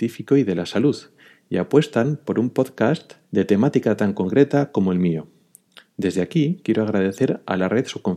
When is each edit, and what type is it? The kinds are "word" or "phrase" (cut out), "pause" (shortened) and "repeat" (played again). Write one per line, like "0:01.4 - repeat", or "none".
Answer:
0:03.2 - pause